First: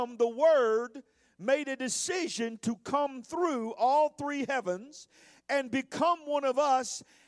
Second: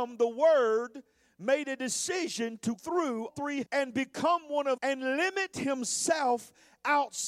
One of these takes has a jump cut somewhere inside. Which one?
second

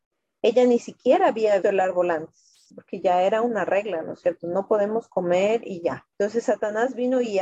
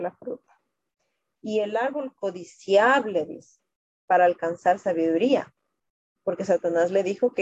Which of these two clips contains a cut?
first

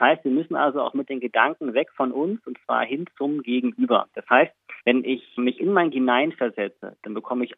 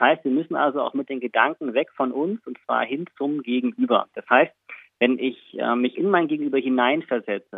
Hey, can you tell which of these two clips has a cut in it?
first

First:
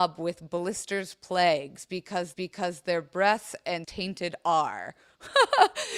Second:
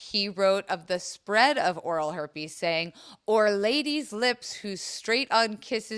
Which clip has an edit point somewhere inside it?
first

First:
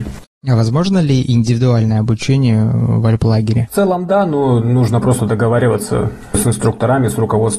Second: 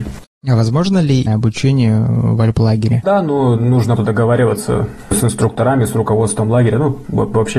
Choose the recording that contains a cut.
second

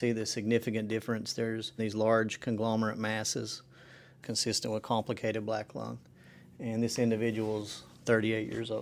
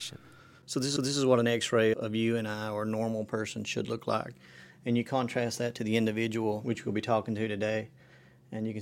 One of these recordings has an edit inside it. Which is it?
second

